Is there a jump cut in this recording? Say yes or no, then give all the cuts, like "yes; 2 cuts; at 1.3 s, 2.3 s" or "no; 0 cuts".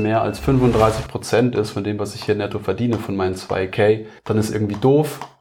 yes; 1 cut; at 4.2 s